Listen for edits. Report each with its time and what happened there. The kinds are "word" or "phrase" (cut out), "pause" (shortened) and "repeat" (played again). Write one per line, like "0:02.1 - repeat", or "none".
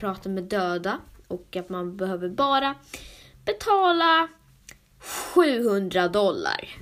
none